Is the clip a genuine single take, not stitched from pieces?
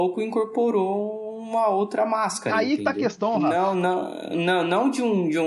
yes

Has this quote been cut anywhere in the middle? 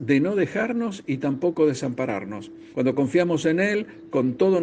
yes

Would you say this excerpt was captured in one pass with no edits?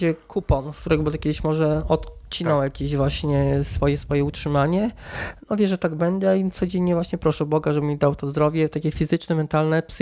yes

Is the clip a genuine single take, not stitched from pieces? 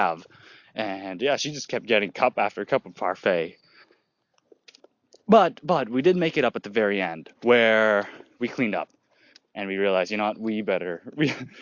yes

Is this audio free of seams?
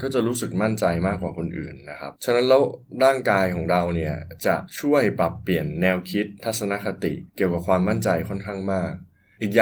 no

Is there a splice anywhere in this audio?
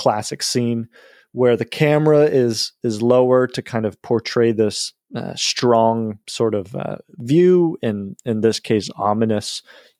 yes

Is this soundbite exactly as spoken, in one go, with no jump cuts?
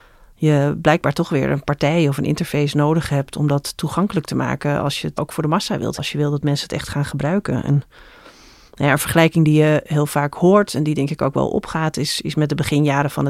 no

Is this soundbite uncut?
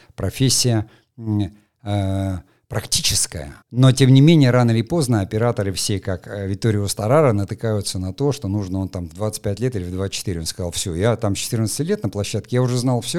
no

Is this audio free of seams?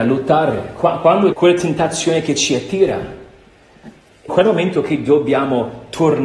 no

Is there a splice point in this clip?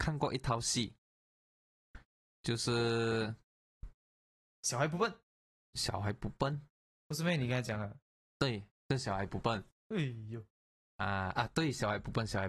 yes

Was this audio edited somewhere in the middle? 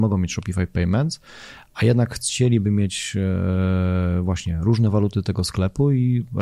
no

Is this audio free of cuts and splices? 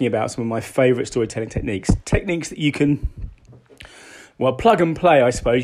yes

